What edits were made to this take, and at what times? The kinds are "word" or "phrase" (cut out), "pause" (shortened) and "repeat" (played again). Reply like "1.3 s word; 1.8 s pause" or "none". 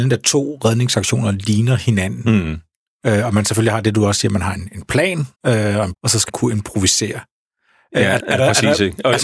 5.3 s pause; 5.9 s word; 6.3 s word; 8.2 s word